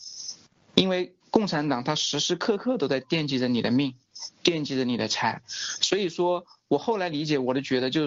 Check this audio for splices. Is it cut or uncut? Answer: cut